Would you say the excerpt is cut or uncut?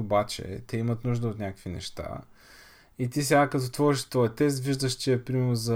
uncut